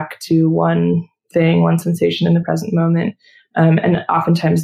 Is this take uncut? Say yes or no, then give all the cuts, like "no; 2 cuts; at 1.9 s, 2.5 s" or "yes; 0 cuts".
yes; 0 cuts